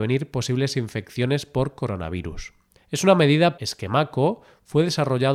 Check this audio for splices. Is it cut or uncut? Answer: cut